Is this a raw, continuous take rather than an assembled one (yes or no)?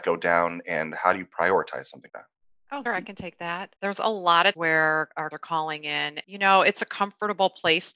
no